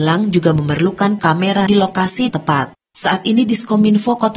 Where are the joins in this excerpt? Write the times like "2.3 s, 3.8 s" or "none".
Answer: 1.2 s, 1.7 s, 2.3 s